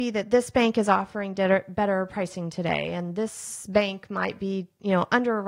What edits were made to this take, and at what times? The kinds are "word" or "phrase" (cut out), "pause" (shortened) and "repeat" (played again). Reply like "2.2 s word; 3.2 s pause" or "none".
none